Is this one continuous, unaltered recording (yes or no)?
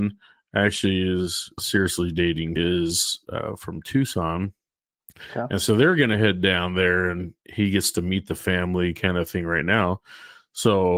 no